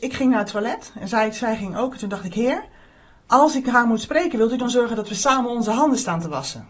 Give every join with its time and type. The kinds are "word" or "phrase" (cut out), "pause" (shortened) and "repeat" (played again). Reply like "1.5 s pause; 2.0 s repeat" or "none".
none